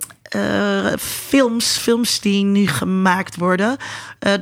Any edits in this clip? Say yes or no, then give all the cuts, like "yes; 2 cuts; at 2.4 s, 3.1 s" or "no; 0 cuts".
yes; 1 cut; at 1.8 s